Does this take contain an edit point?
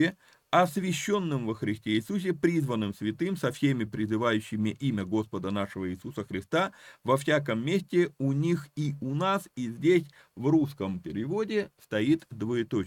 no; 0 cuts

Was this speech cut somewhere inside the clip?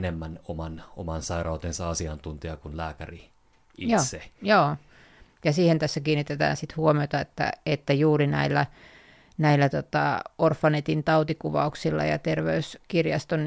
no; 0 cuts

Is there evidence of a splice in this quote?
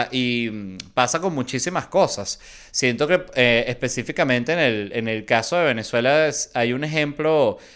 no; 0 cuts

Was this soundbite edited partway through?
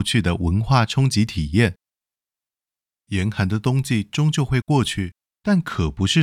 no; 0 cuts

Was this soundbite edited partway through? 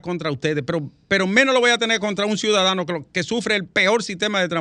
no; 0 cuts

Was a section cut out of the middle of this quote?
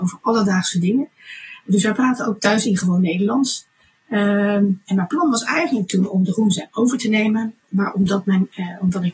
no; 0 cuts

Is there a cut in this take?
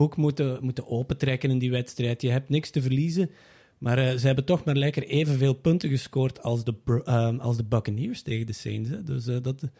no; 0 cuts

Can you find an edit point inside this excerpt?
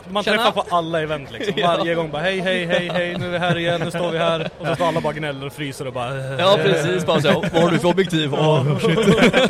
no; 0 cuts

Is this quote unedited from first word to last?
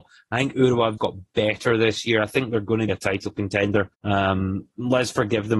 no; 3 cuts; at 1.0 s, 2.9 s, 3.9 s

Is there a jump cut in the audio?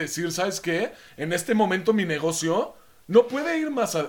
no; 0 cuts

